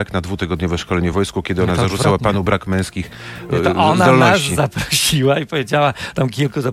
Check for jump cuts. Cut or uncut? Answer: uncut